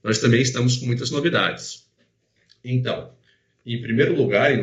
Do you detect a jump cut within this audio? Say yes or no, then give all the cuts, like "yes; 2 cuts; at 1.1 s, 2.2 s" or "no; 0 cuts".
no; 0 cuts